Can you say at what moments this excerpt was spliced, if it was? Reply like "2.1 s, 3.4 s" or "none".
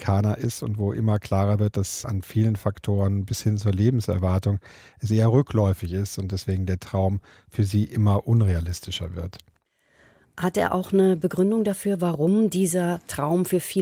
none